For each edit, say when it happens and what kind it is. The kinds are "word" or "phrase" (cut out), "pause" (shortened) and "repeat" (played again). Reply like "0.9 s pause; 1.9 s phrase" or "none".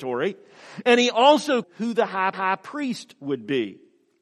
1.6 s word; 2.3 s repeat

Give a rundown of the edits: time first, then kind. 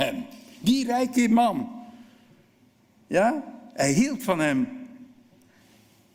none

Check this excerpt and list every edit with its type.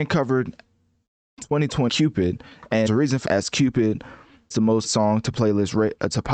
1.9 s word; 2.9 s word; 3.2 s word; 4.5 s word; 4.8 s word

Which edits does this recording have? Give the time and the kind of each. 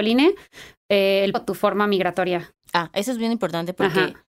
1.3 s word

